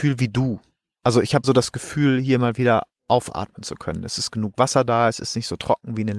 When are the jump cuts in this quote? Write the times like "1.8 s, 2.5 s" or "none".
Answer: 1.4 s